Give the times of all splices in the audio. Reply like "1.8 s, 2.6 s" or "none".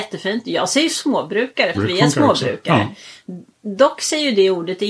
1.7 s

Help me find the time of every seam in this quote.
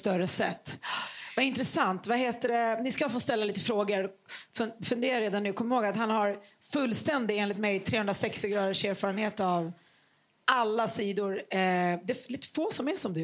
none

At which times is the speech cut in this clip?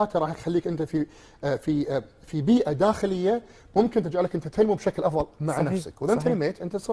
none

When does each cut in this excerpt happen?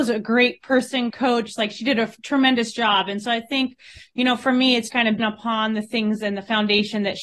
1.1 s, 4.9 s, 5.2 s

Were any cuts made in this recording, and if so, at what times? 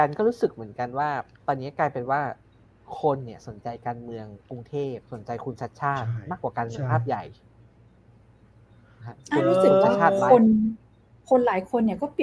4.4 s, 5.0 s

